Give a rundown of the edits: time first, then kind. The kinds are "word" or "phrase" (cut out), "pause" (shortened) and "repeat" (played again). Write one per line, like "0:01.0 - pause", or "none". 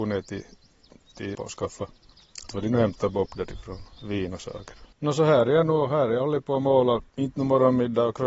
0:01.3 - word
0:02.5 - word
0:04.9 - pause
0:07.1 - pause